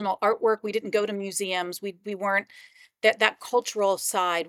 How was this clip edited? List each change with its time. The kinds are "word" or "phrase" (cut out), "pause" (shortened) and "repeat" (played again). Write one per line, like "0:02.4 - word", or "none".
none